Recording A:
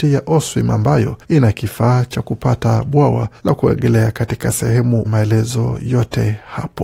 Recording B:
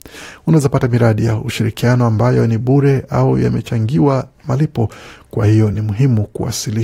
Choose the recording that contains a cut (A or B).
A